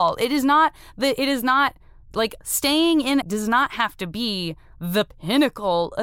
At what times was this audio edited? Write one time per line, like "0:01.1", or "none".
0:02.4
0:03.2